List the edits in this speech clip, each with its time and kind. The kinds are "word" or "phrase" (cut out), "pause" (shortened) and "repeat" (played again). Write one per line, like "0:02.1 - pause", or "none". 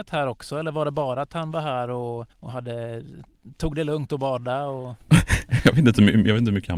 0:02.3 - pause